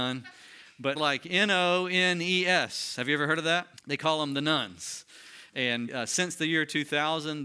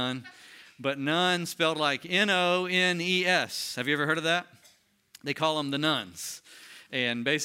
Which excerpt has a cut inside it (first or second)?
first